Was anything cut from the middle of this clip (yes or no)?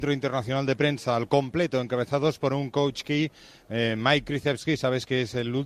no